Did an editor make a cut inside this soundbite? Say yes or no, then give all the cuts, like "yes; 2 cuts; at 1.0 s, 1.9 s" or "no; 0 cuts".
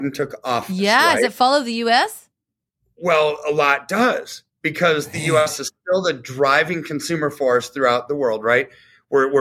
no; 0 cuts